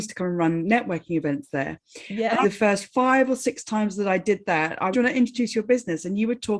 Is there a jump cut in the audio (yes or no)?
yes